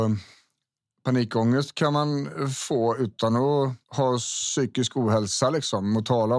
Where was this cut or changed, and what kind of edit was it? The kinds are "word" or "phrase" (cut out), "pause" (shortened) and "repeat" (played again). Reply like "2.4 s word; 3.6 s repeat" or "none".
3.8 s pause